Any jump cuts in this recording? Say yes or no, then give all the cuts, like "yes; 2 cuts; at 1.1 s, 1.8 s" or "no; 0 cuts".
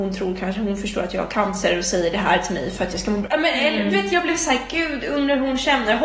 no; 0 cuts